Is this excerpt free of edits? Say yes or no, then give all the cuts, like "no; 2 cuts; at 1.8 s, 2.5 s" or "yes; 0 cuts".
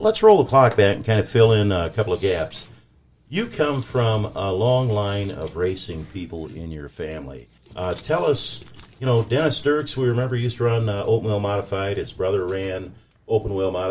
no; 1 cut; at 7.6 s